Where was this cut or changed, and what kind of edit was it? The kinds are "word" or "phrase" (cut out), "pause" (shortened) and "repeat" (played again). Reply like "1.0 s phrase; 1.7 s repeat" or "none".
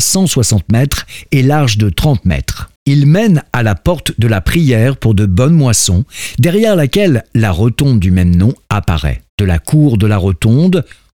2.8 s pause; 9.3 s pause